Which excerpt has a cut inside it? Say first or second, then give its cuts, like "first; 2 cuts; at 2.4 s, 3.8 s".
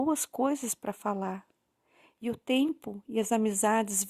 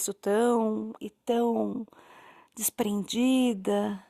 second; 1 cut; at 1.0 s